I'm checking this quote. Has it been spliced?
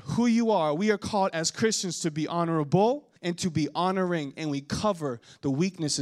yes; 1 cut; at 3.2 s

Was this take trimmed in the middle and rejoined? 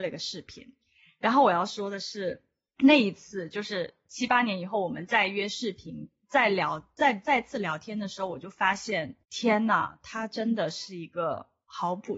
yes; 1 cut; at 9.2 s

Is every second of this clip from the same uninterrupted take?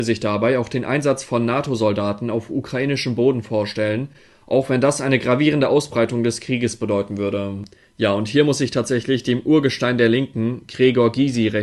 yes; 0 cuts

